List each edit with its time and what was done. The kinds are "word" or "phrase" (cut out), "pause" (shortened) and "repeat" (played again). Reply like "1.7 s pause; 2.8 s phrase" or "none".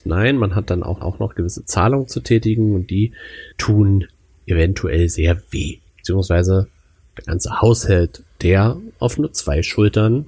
1.0 s repeat; 3.5 s pause; 5.9 s pause